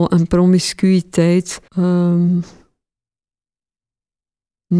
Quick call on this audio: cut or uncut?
cut